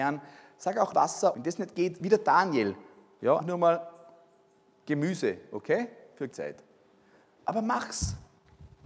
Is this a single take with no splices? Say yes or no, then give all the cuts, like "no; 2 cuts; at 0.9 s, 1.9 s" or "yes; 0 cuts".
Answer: no; 4 cuts; at 0.9 s, 1.3 s, 3.4 s, 6.3 s